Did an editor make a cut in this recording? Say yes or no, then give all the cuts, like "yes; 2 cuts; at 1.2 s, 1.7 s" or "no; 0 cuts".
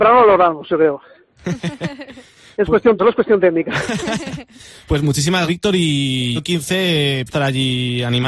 yes; 4 cuts; at 3.0 s, 5.5 s, 6.4 s, 7.3 s